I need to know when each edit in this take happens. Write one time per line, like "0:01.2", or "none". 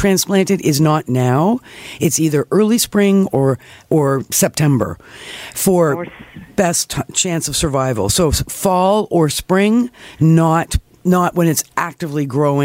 none